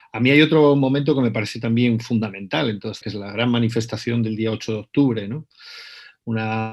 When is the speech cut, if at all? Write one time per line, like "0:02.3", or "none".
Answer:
0:03.0